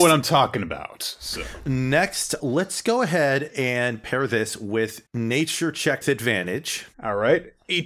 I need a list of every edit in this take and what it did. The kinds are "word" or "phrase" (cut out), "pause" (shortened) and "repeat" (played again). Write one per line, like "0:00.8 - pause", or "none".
0:02.4 - word
0:05.1 - word
0:06.0 - word
0:06.9 - pause